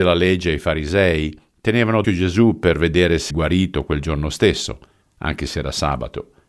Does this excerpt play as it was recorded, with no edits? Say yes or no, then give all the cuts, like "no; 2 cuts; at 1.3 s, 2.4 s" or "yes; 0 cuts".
no; 3 cuts; at 2.0 s, 3.3 s, 5.0 s